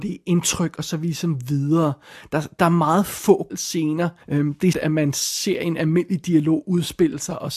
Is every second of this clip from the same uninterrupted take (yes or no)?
no